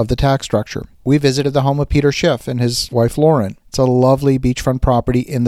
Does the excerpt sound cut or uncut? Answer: cut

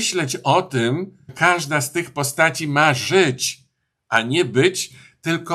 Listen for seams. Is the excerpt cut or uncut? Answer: cut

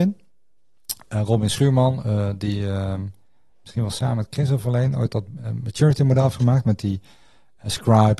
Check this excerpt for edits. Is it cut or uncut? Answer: uncut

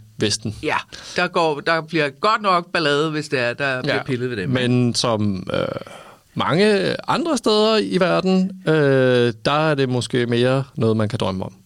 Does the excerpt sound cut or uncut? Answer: uncut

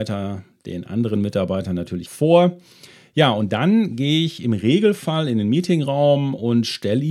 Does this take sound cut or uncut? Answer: cut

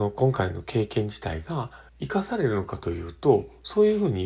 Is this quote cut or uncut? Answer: cut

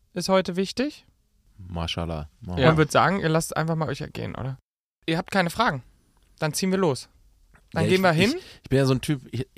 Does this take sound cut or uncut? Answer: cut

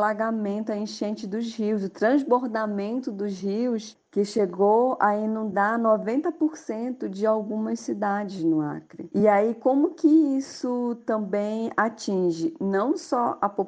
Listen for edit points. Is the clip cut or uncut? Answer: uncut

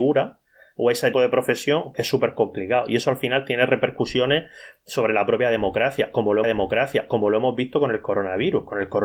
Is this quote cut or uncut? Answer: cut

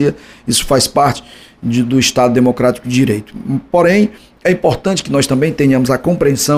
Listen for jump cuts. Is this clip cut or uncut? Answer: uncut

